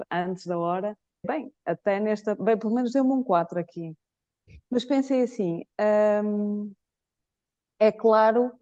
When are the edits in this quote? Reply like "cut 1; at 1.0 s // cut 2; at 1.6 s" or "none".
cut 1; at 1.2 s